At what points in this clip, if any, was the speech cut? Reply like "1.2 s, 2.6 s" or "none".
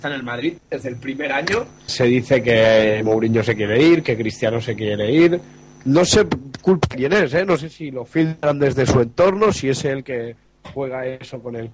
1.9 s